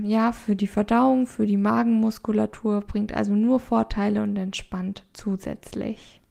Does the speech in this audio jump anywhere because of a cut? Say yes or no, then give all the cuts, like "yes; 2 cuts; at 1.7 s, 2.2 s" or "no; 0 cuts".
no; 0 cuts